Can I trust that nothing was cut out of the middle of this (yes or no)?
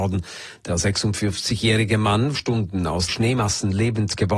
no